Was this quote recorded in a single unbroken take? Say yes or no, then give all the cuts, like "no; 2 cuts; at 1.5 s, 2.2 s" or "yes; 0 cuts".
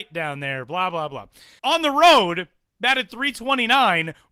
no; 1 cut; at 1.6 s